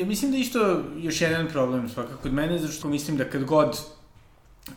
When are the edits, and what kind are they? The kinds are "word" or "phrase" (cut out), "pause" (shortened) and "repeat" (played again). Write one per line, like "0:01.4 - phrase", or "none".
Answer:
0:02.2 - word
0:02.8 - word